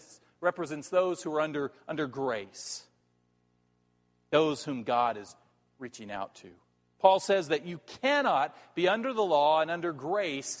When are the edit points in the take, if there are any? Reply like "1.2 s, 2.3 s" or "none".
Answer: none